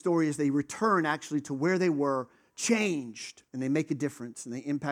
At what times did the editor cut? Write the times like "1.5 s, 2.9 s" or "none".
3.5 s